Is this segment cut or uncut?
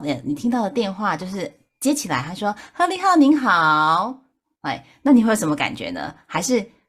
uncut